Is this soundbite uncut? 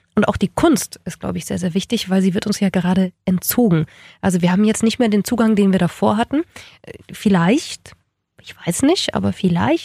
yes; 0 cuts

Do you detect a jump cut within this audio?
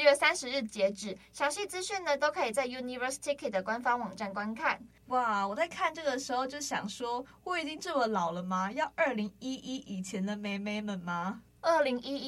no; 0 cuts

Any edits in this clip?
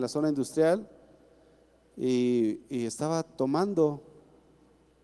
no; 0 cuts

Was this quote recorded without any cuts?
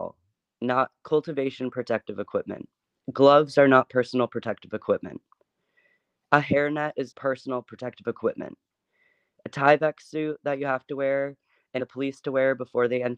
no; 2 cuts; at 7.1 s, 11.8 s

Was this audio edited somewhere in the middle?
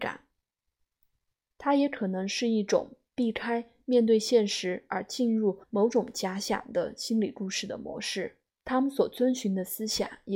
yes; 2 cuts; at 5.6 s, 8.5 s

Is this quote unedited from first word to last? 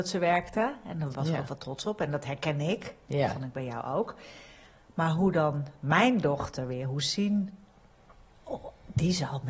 yes; 0 cuts

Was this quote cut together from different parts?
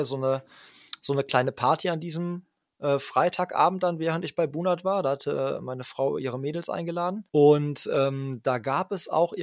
yes; 1 cut; at 7.3 s

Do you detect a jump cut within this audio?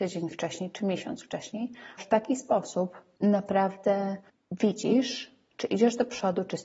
yes; 1 cut; at 2.0 s

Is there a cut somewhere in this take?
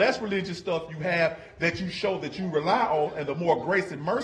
no; 0 cuts

